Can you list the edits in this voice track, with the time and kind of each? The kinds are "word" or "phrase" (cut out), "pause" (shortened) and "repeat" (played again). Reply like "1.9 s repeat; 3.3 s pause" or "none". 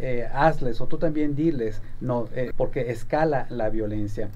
2.5 s phrase

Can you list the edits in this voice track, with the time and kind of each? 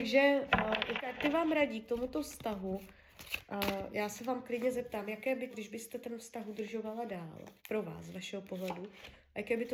1.0 s word; 5.5 s phrase; 7.6 s pause

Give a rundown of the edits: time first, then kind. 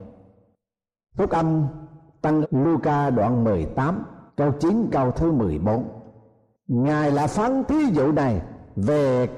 2.4 s word; 4.3 s pause; 4.9 s word

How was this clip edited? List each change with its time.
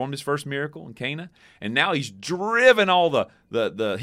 none

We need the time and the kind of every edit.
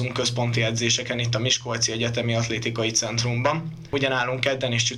none

